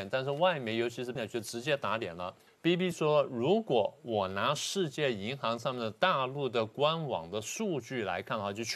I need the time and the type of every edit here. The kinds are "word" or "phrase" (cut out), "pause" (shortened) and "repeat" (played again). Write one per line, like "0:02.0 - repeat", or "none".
0:01.2 - word
0:02.5 - pause
0:02.9 - word